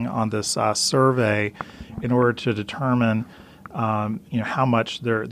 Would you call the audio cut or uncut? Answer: cut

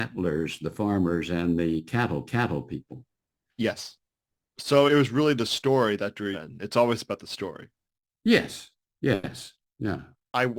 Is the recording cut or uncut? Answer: cut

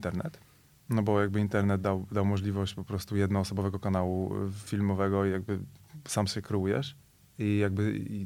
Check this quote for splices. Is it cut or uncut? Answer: uncut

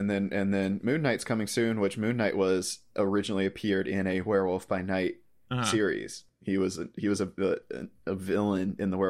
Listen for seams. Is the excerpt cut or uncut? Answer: uncut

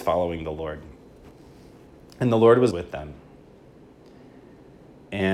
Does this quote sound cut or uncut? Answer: cut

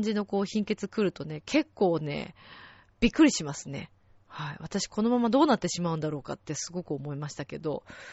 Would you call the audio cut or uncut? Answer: uncut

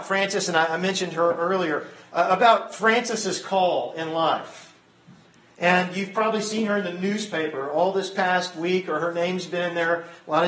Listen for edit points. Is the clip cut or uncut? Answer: uncut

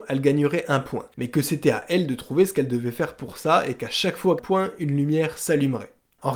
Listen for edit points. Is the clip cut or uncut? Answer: cut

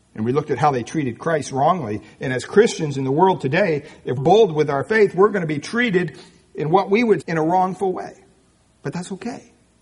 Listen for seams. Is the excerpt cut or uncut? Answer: cut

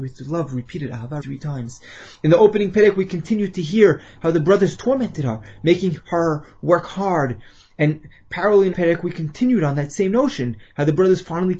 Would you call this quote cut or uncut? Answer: cut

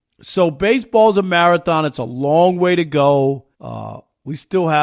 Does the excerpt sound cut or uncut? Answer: cut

